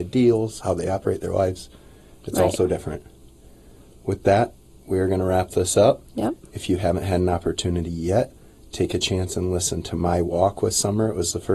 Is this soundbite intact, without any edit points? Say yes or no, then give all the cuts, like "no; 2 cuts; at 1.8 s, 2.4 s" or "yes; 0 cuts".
yes; 0 cuts